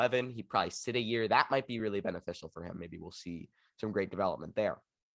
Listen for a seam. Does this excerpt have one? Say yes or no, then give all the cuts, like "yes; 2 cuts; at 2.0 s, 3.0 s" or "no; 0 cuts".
no; 0 cuts